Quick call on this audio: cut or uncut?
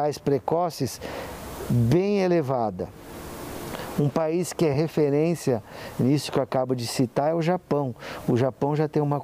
uncut